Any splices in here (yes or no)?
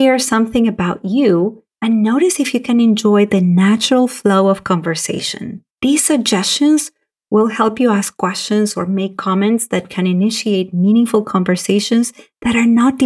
yes